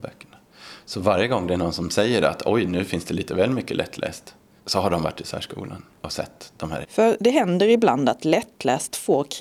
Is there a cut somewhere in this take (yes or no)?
yes